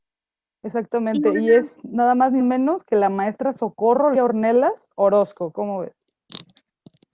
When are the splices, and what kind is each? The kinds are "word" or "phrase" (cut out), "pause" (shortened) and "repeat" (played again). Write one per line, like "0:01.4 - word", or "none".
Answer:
0:02.4 - word
0:04.2 - word

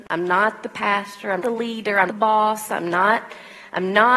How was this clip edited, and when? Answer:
0:01.4 - word
0:02.1 - word

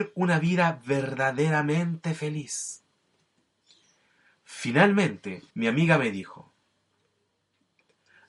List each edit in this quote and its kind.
0:05.5 - pause

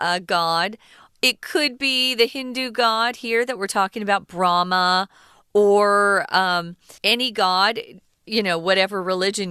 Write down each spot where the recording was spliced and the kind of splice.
0:07.0 - pause

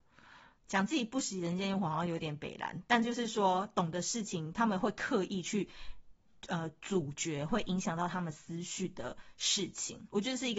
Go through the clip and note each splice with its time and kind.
none

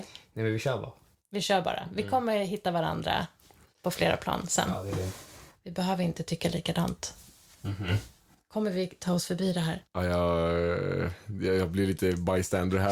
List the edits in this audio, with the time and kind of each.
none

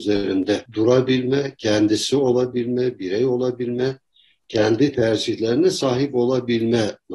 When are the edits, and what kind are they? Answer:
none

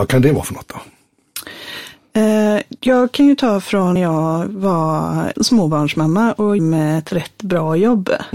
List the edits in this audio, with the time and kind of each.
0:02.8 - pause
0:04.0 - word
0:05.3 - word
0:06.6 - word

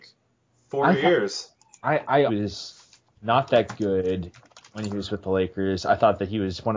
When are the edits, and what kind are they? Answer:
0:02.3 - phrase

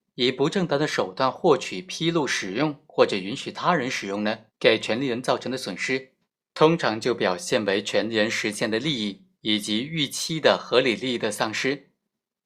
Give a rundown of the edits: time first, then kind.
0:04.5 - pause
0:06.3 - pause

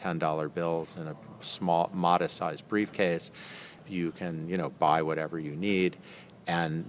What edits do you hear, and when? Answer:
none

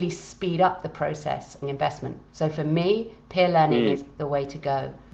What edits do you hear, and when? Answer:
0:01.6 - phrase
0:02.3 - pause
0:04.2 - word

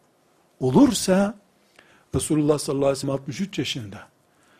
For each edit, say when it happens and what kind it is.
0:03.0 - word

